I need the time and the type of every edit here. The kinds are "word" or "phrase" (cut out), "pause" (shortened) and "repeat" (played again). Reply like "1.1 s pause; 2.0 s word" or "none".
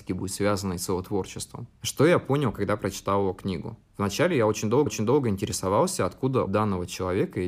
3.9 s pause; 4.9 s repeat; 6.5 s word